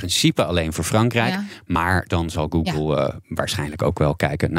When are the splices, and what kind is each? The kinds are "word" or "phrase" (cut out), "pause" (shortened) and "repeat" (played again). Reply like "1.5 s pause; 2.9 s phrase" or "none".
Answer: none